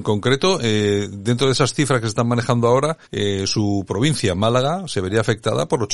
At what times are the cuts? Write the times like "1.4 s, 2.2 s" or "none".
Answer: 3.0 s